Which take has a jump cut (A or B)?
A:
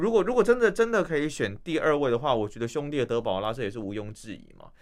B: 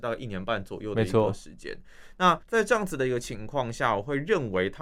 B